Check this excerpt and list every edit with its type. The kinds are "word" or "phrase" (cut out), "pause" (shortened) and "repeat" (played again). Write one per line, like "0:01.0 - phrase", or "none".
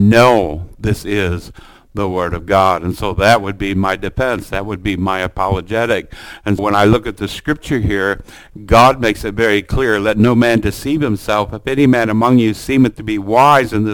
0:06.6 - word